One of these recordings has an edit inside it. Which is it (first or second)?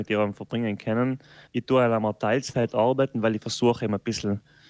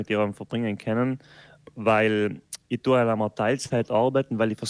first